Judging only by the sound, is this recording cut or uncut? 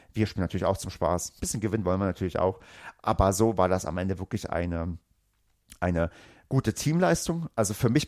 uncut